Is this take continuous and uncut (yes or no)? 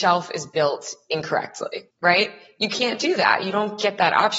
no